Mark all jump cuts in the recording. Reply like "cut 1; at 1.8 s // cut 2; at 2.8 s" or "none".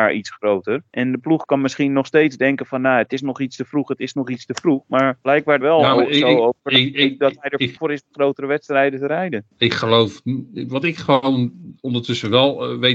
cut 1; at 5.6 s // cut 2; at 7.8 s